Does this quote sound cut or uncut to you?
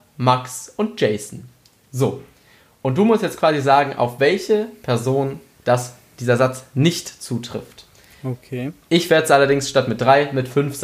uncut